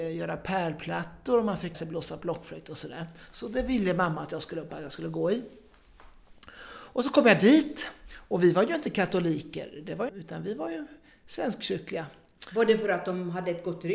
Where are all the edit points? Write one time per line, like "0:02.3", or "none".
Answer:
0:01.7
0:04.7
0:10.1